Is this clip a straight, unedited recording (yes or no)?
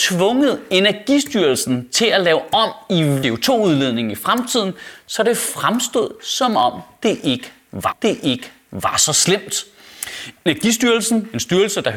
no